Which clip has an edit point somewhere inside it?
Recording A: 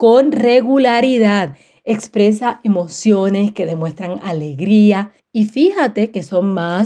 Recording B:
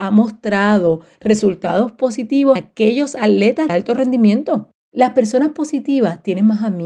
B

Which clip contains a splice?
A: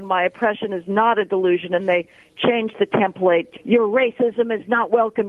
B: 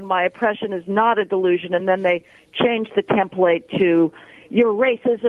A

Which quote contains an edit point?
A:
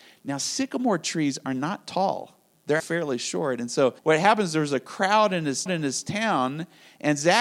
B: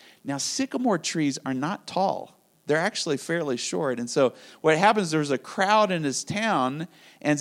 A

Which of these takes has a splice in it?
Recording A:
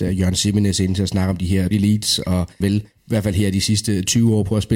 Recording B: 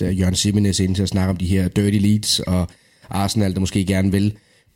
A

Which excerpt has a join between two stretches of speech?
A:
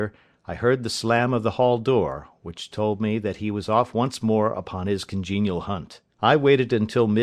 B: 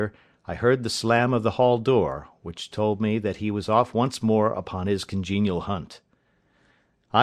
A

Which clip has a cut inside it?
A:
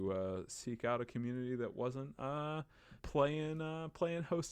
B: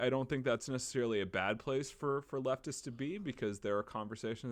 A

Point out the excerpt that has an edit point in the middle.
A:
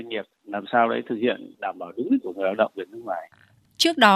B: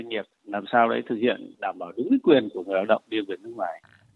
A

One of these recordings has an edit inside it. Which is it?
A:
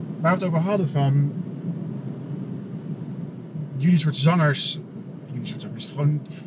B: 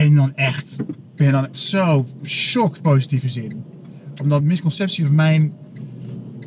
B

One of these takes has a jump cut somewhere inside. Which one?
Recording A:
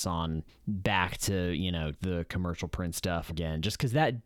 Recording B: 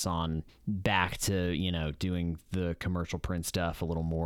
A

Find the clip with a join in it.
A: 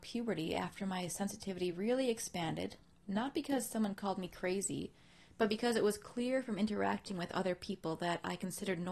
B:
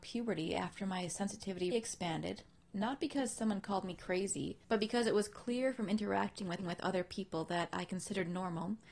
B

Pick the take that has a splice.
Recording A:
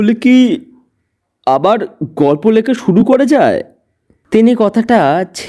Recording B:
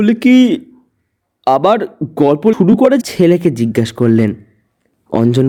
B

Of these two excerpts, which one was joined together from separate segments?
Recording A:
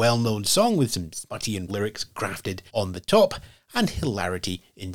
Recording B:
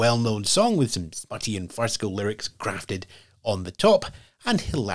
A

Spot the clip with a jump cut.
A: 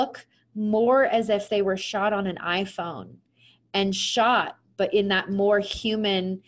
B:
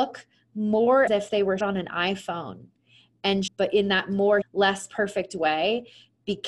B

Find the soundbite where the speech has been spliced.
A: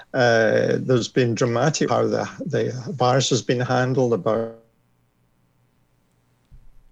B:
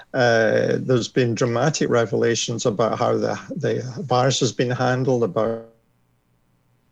A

